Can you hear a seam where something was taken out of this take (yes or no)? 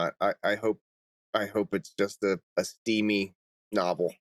yes